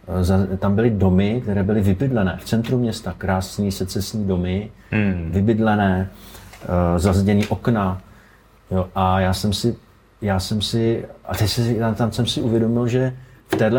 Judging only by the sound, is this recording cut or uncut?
uncut